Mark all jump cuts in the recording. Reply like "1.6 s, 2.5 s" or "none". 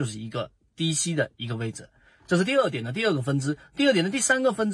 none